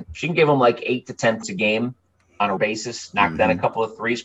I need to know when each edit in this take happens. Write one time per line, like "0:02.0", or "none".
0:01.4
0:02.6